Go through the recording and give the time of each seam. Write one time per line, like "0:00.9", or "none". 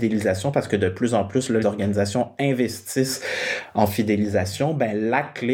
0:01.6